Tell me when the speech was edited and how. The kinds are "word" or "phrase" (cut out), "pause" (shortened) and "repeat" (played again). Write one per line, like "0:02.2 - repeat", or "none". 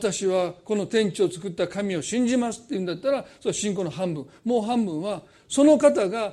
none